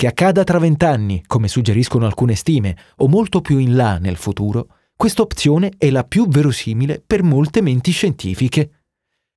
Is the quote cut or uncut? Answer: uncut